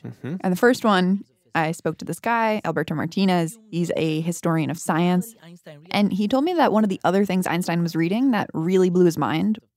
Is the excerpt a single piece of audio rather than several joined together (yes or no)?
yes